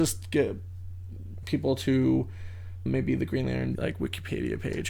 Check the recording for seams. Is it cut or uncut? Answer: cut